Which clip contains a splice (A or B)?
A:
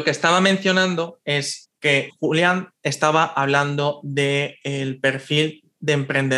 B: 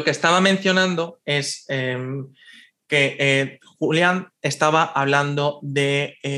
A